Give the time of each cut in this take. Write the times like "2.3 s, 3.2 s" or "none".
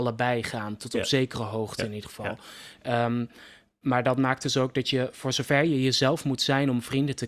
none